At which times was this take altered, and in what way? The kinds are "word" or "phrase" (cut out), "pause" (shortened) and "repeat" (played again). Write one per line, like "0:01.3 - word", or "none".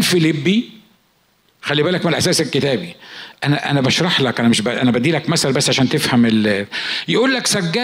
none